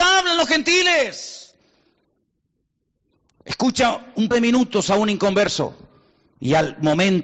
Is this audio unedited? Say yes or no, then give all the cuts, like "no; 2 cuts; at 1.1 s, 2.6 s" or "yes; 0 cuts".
no; 1 cut; at 4.3 s